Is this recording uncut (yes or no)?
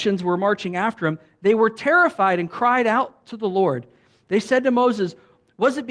yes